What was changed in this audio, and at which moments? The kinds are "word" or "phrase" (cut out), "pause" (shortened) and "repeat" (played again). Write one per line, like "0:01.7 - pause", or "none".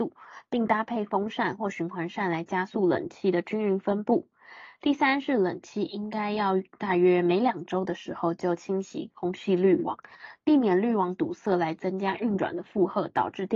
none

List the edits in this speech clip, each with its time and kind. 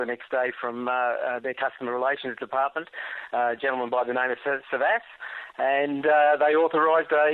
none

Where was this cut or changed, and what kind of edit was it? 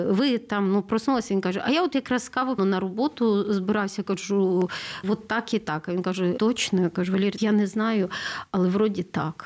0:02.6 - word
0:05.0 - word
0:06.4 - word
0:07.4 - word

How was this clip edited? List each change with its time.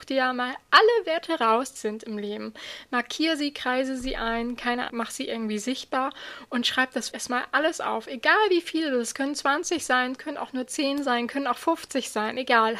0:01.8 - phrase
0:04.9 - word
0:07.1 - word

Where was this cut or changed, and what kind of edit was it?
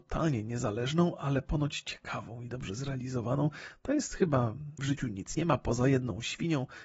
0:04.8 - phrase

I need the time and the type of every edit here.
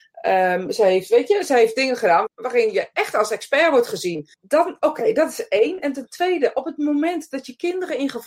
0:02.3 - word
0:04.3 - pause

